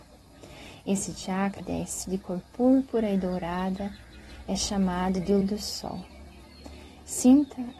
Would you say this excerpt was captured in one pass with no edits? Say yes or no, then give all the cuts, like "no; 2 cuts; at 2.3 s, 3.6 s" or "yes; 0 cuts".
no; 3 cuts; at 1.6 s, 2.0 s, 5.4 s